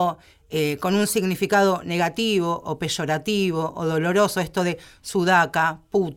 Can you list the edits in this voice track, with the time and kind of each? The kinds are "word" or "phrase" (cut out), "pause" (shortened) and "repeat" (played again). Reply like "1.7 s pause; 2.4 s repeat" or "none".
none